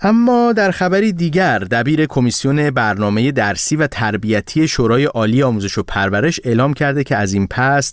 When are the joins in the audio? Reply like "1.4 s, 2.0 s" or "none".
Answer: none